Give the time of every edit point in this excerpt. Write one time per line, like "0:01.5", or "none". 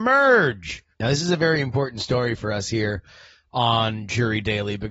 0:00.9